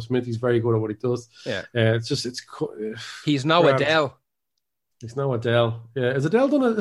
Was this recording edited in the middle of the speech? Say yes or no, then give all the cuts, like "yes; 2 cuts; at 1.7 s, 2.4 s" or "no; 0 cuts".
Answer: no; 0 cuts